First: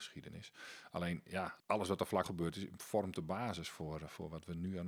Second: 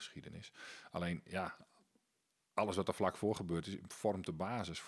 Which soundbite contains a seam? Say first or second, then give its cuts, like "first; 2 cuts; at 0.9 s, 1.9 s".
first; 2 cuts; at 1.6 s, 2.2 s